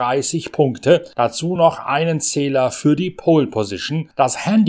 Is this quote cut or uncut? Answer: uncut